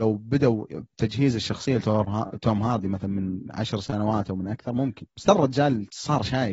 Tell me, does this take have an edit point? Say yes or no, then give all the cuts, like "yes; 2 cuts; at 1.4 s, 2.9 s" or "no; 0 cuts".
no; 0 cuts